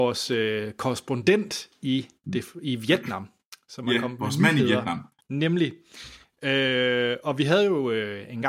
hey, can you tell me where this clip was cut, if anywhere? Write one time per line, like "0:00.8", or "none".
0:05.2